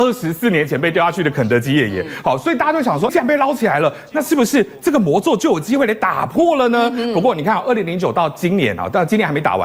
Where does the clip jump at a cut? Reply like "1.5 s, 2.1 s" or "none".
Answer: 3.1 s